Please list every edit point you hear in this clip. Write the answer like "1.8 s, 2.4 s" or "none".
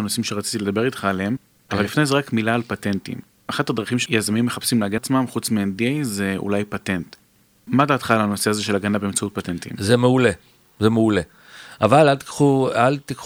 5.0 s